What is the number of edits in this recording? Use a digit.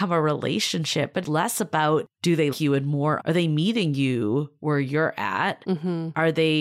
3